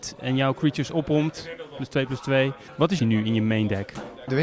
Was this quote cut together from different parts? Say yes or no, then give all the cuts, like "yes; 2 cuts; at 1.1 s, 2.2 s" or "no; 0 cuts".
yes; 1 cut; at 3.0 s